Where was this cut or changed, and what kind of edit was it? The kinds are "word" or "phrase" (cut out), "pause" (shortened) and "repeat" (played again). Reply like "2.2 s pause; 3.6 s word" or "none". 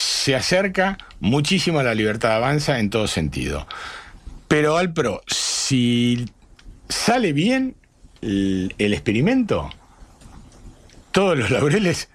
none